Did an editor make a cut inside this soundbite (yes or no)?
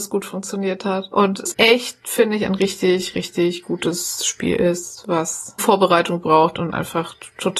yes